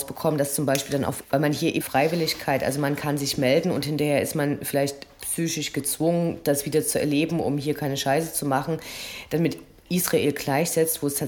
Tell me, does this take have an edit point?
yes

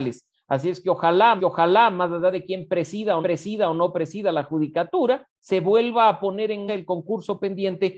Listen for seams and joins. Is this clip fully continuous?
no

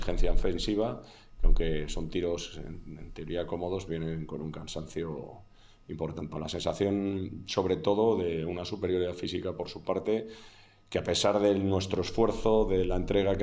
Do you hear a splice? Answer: yes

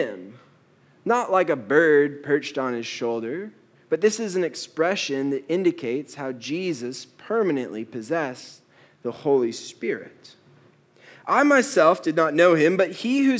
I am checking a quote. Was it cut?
no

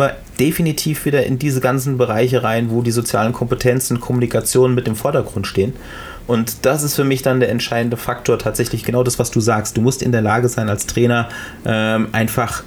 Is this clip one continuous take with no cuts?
yes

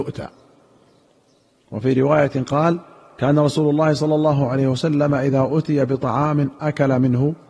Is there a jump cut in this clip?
no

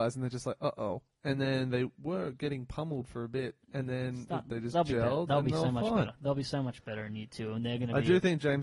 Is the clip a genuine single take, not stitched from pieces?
yes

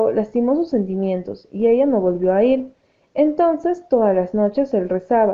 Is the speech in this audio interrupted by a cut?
no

